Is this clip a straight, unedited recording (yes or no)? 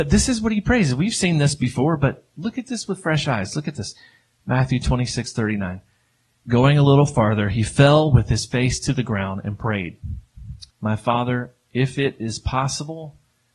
no